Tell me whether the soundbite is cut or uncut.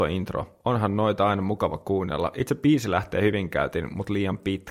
uncut